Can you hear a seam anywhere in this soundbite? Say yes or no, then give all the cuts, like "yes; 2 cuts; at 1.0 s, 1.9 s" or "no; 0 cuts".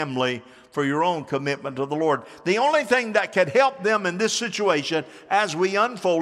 no; 0 cuts